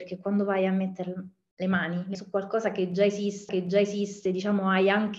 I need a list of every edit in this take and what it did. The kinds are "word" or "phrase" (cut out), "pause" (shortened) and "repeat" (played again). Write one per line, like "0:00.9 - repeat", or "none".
0:02.1 - word
0:03.5 - repeat